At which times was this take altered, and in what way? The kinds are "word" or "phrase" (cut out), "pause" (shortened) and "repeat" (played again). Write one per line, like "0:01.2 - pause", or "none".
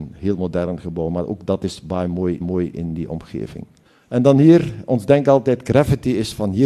0:02.4 - repeat
0:03.8 - pause

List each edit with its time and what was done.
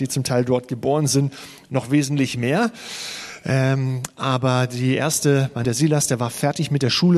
0:05.6 - phrase

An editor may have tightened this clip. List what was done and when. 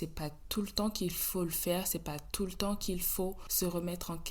none

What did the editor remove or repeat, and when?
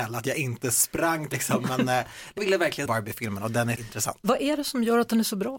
0:01.3 - word
0:02.4 - word
0:02.9 - word
0:03.8 - word

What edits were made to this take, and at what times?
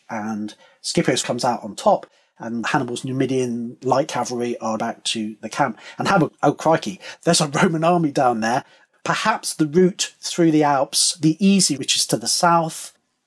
0:01.2 - word
0:04.8 - word
0:06.3 - word
0:11.8 - word

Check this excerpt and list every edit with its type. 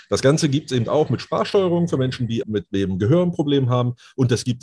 0:02.4 - word

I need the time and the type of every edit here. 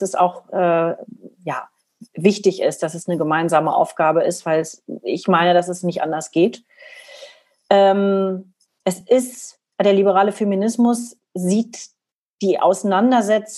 none

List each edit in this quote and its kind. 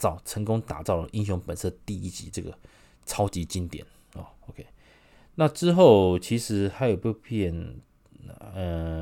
none

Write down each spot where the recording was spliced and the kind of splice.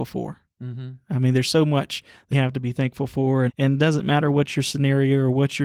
0:02.3 - word
0:03.5 - word

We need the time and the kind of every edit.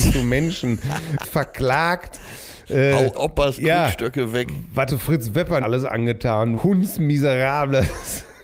0:01.2 - word
0:03.1 - word
0:03.6 - word
0:04.9 - word
0:05.6 - word
0:06.6 - word

